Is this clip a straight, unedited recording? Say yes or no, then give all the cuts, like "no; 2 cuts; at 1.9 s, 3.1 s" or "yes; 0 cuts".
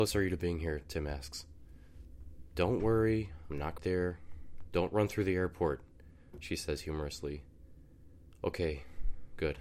no; 1 cut; at 3.8 s